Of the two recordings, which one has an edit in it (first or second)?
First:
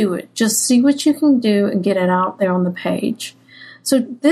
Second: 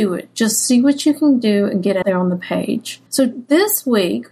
second